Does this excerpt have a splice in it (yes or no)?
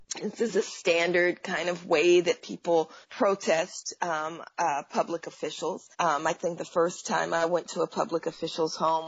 yes